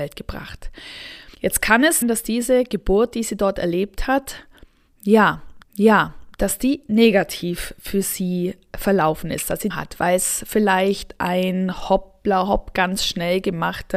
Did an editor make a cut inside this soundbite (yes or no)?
yes